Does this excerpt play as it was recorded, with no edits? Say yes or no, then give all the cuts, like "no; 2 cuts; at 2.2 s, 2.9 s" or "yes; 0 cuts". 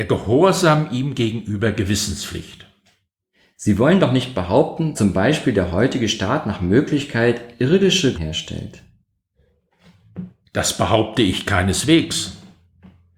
no; 2 cuts; at 4.9 s, 8.1 s